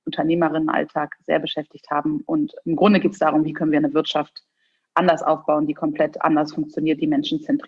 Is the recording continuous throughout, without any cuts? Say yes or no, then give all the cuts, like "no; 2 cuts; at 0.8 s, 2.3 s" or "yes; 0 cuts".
yes; 0 cuts